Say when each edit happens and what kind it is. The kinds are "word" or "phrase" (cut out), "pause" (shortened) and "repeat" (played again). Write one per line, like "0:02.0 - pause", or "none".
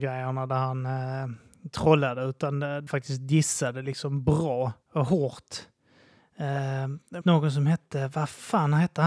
0:02.9 - word
0:04.8 - pause
0:07.2 - word